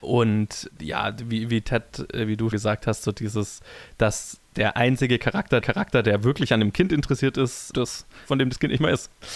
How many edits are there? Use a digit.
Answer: 3